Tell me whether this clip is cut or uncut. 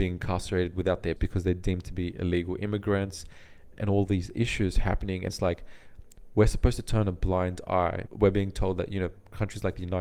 cut